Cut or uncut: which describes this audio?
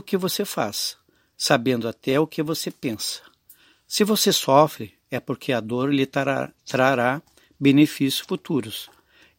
uncut